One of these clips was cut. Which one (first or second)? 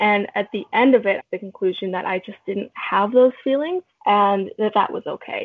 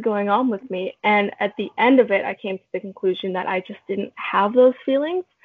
first